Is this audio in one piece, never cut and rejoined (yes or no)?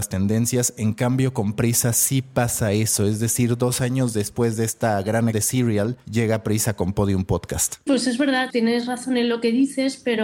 no